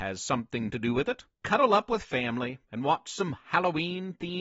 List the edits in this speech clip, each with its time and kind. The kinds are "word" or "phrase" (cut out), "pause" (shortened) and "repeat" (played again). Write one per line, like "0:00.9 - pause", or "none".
0:01.3 - pause
0:02.6 - pause